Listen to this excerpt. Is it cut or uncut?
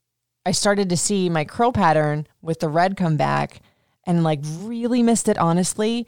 uncut